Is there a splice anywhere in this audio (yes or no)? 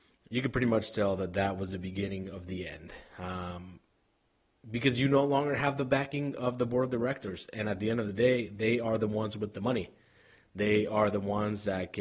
no